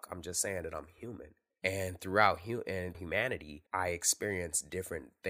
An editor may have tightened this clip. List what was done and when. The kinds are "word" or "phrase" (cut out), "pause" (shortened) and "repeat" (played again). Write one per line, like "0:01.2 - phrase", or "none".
0:01.5 - pause
0:02.9 - phrase
0:03.7 - pause